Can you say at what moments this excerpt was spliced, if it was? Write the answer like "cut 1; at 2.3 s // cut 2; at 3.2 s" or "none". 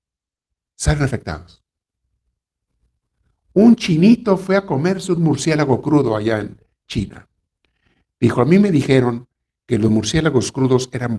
none